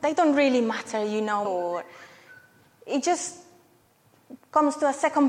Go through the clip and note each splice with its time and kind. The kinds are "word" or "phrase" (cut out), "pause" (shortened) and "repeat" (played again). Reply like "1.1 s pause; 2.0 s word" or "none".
1.4 s word